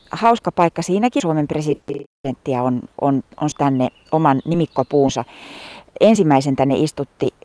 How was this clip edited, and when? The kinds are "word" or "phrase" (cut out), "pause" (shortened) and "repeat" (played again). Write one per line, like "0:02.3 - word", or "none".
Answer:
0:01.2 - phrase
0:03.5 - word

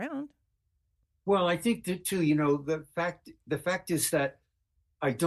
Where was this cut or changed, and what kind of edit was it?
none

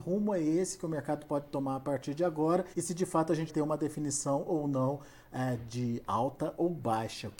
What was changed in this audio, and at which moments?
0:02.7 - pause
0:03.5 - word

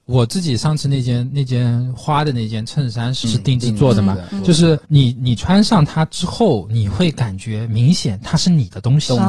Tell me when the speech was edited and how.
0:03.2 - word
0:04.8 - pause

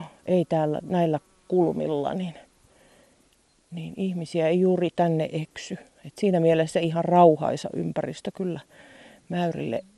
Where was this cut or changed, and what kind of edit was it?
none

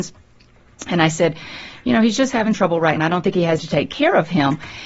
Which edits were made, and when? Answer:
0:02.5 - word
0:03.0 - word
0:03.6 - word

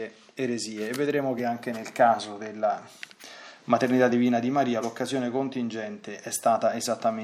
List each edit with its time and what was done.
none

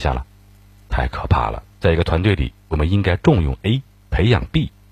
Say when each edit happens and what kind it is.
0:01.7 - pause

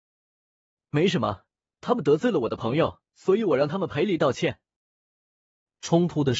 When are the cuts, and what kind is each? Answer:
0:03.1 - pause

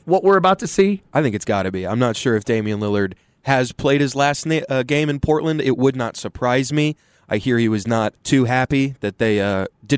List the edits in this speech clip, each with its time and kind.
0:08.2 - pause

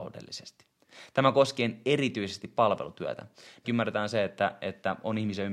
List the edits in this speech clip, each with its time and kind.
0:03.6 - word

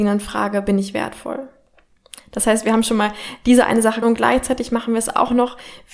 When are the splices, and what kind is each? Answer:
0:04.0 - word

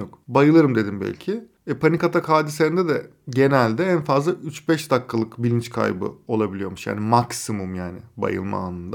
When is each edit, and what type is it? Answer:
none

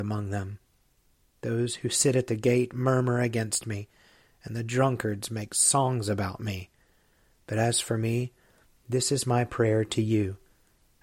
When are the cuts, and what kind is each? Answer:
none

